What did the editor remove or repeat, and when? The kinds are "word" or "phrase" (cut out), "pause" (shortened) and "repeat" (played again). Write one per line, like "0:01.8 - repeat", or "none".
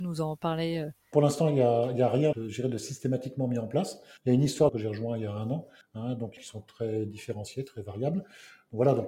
0:01.1 - word
0:02.3 - word
0:04.2 - pause
0:04.7 - phrase
0:05.8 - pause
0:06.4 - phrase